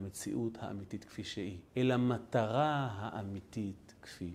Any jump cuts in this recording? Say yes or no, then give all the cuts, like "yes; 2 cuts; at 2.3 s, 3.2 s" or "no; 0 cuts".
yes; 1 cut; at 1.7 s